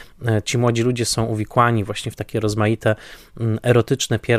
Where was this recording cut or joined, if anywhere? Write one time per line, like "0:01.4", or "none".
none